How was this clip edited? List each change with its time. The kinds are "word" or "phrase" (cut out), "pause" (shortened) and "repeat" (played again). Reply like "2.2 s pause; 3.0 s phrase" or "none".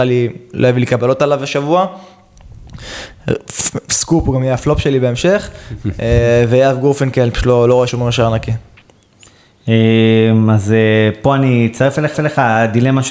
7.9 s word; 12.1 s repeat